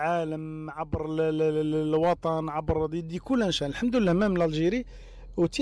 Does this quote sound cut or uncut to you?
uncut